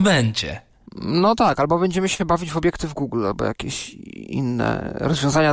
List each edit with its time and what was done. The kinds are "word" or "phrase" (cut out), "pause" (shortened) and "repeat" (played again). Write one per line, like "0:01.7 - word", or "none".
none